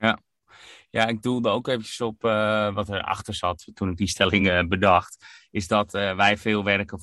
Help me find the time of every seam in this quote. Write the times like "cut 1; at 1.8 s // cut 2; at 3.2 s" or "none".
none